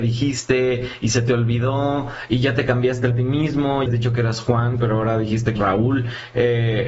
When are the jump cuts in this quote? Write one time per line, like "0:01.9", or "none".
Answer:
0:03.1
0:03.9
0:05.6